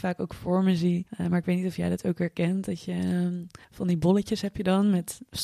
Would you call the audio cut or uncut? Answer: cut